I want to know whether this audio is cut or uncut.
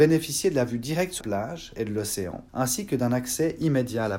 cut